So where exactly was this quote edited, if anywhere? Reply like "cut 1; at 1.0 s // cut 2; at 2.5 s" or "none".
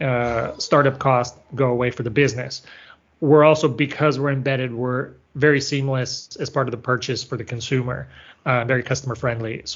none